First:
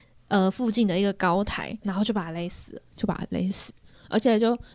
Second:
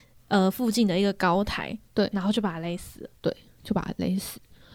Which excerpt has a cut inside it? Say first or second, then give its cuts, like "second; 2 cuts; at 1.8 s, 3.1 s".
first; 2 cuts; at 1.8 s, 2.9 s